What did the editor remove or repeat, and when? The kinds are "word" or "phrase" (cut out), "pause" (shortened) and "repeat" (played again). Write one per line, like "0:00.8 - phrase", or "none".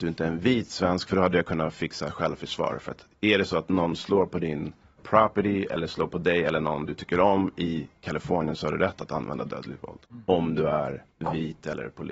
0:05.0 - word
0:10.0 - pause
0:11.1 - pause